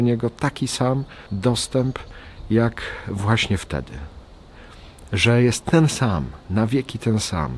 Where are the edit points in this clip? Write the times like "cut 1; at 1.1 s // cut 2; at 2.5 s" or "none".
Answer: cut 1; at 1.3 s